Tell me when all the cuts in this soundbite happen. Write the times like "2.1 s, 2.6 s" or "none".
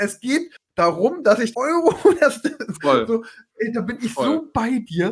1.5 s